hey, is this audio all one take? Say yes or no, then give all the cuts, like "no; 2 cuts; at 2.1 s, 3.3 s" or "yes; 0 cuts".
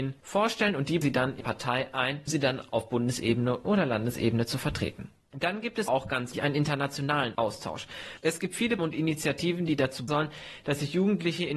no; 8 cuts; at 1.0 s, 1.4 s, 2.3 s, 3.6 s, 5.9 s, 6.3 s, 8.8 s, 10.1 s